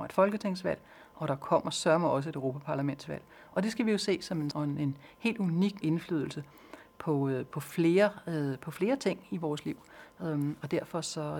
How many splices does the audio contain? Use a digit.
2